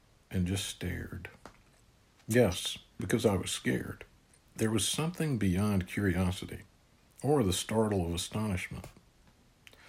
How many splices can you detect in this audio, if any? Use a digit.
2